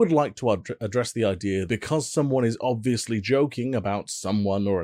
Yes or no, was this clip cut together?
yes